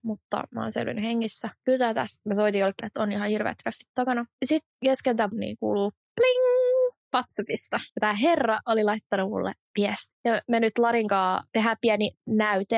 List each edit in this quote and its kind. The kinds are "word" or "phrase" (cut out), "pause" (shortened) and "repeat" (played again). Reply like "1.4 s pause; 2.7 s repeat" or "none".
2.8 s phrase; 4.3 s pause; 5.3 s word; 10.2 s pause